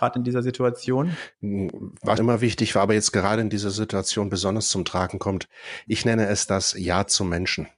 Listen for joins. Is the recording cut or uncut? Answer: cut